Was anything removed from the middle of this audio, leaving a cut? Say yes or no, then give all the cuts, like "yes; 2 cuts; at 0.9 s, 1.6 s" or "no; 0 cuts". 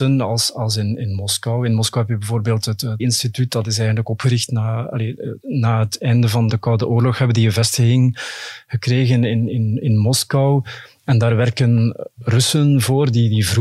yes; 3 cuts; at 3.0 s, 5.4 s, 6.5 s